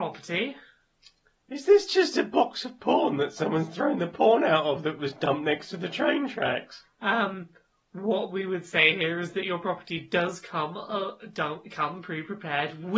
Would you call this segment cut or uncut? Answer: uncut